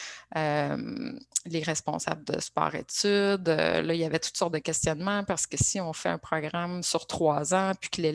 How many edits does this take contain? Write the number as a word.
zero